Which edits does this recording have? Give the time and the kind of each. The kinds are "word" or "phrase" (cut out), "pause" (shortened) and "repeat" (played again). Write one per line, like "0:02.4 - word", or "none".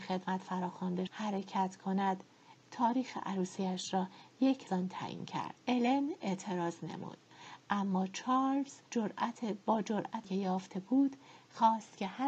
0:01.1 - word
0:02.6 - word
0:04.7 - phrase
0:05.6 - pause
0:08.9 - pause
0:10.2 - word

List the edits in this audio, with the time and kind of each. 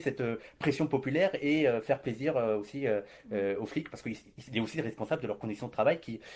none

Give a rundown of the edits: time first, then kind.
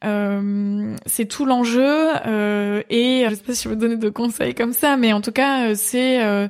0:03.3 - word

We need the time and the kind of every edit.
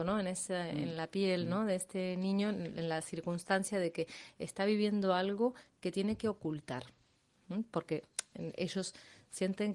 none

